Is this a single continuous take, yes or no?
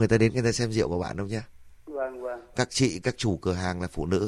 no